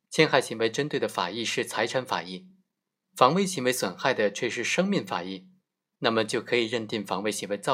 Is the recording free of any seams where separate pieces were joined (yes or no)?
yes